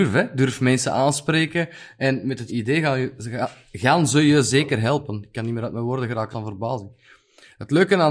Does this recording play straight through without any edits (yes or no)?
no